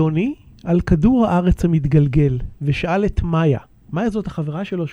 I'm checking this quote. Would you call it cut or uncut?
cut